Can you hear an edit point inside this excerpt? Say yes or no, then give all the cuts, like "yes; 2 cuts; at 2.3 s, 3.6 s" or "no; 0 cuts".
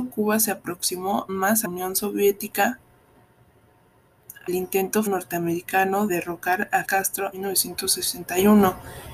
yes; 7 cuts; at 1.3 s, 1.6 s, 4.5 s, 5.1 s, 6.1 s, 6.8 s, 7.3 s